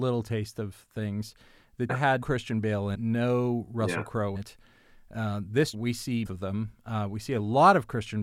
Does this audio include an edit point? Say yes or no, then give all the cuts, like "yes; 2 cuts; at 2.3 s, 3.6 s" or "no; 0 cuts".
yes; 6 cuts; at 1.9 s, 2.2 s, 2.9 s, 4.4 s, 5.7 s, 6.3 s